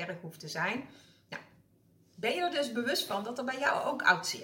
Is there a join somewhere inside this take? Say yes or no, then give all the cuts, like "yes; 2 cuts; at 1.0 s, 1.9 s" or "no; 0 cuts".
no; 0 cuts